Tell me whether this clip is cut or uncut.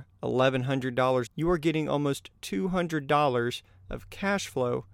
cut